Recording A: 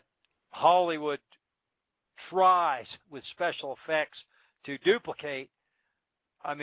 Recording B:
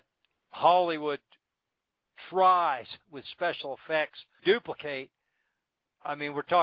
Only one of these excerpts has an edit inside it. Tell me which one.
B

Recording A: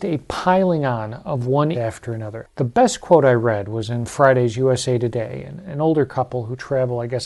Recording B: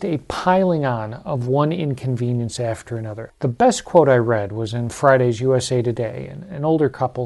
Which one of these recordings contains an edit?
A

